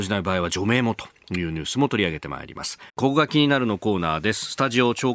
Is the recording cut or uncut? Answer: cut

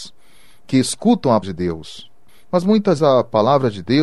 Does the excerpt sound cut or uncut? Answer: cut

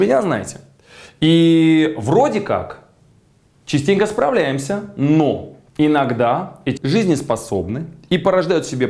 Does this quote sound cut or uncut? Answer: cut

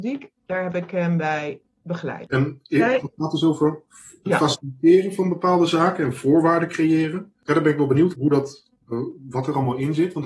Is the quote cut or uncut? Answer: cut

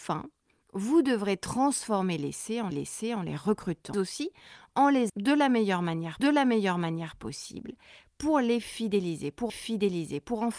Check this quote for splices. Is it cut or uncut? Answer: cut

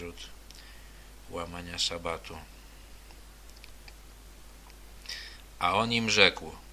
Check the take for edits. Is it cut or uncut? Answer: uncut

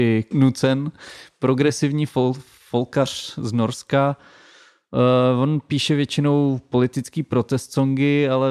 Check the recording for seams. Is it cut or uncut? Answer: uncut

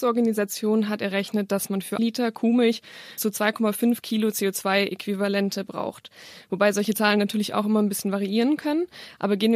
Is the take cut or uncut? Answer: cut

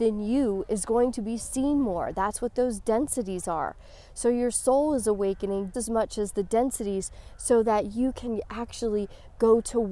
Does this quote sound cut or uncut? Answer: cut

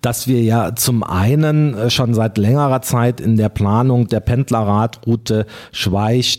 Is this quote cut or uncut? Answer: uncut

